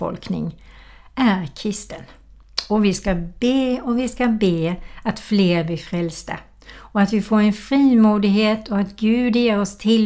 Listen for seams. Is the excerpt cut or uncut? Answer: uncut